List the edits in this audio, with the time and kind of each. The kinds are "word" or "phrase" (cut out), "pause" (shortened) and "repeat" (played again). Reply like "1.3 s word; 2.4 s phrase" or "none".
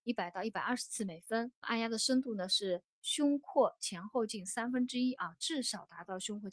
1.6 s word